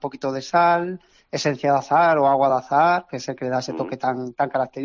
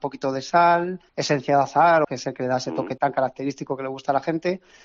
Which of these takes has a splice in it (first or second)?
second